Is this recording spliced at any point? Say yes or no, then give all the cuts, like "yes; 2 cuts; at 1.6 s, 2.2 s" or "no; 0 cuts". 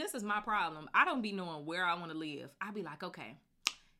no; 0 cuts